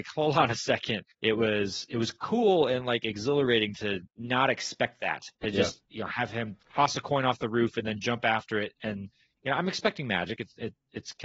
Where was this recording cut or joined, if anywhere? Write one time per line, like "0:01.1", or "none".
0:01.1
0:04.1
0:05.3
0:05.8